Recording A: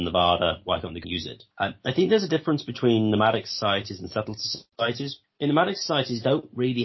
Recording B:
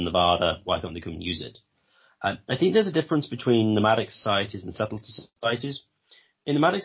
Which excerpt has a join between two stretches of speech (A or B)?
A